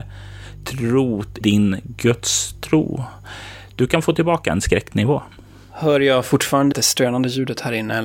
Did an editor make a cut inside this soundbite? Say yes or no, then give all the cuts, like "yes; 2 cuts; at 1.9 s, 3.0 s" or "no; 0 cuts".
yes; 2 cuts; at 1.4 s, 6.7 s